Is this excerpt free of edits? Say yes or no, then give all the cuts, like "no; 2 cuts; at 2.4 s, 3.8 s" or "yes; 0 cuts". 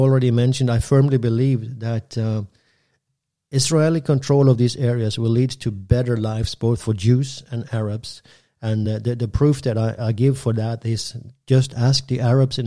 yes; 0 cuts